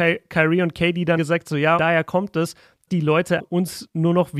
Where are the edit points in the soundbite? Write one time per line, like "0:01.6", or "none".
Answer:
0:01.2
0:01.8
0:02.9
0:03.4